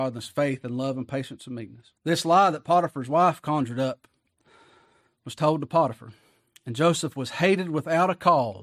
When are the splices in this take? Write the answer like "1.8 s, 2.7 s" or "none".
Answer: 2.0 s